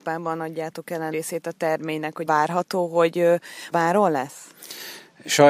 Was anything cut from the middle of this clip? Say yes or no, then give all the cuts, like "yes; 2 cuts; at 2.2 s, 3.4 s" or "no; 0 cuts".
yes; 3 cuts; at 1.1 s, 2.3 s, 3.7 s